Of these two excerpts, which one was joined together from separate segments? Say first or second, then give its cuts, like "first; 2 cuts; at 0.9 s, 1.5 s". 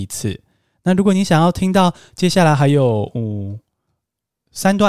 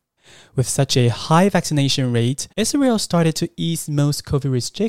second; 1 cut; at 2.5 s